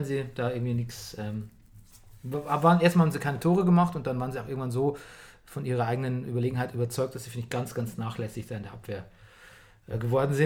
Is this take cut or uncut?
uncut